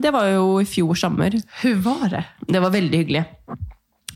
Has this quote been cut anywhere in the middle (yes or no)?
no